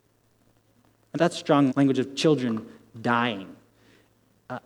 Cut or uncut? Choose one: cut